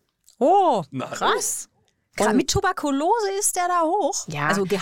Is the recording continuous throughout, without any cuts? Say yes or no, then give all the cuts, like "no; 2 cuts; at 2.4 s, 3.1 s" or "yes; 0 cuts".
yes; 0 cuts